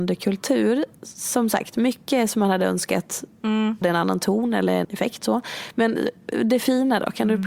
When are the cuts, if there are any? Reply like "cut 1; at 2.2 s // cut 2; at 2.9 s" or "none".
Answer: cut 1; at 1.0 s // cut 2; at 3.8 s // cut 3; at 4.8 s